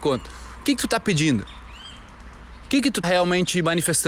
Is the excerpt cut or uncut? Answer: cut